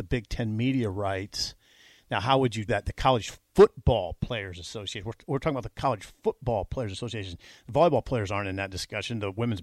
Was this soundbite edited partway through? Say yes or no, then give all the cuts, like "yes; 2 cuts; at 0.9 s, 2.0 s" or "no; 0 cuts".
yes; 1 cut; at 2.7 s